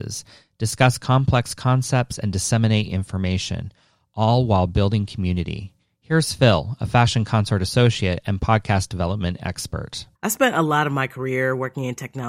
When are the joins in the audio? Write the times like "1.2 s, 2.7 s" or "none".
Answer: 10.1 s